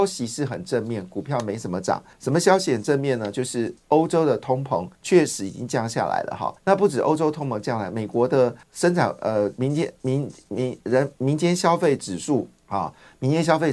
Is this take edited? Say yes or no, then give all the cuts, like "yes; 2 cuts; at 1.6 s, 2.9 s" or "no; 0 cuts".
yes; 6 cuts; at 2.1 s, 3.8 s, 4.9 s, 6.6 s, 8.6 s, 12.6 s